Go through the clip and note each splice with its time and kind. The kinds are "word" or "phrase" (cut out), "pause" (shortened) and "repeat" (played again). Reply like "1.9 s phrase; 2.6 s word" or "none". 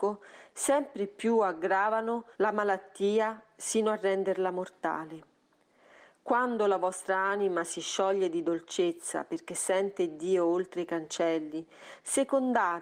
2.3 s pause